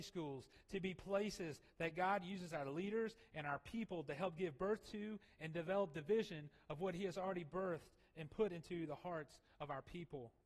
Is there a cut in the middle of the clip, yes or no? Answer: no